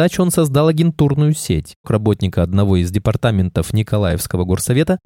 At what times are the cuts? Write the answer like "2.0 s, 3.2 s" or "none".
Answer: 1.8 s